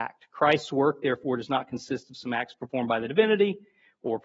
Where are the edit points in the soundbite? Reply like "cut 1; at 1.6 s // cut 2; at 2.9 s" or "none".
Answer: none